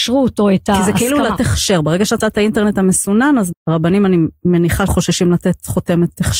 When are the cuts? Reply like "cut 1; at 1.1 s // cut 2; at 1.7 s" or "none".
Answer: cut 1; at 1.4 s // cut 2; at 2.2 s // cut 3; at 3.5 s // cut 4; at 4.9 s